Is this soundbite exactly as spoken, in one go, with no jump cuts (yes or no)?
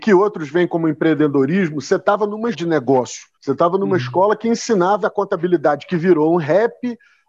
no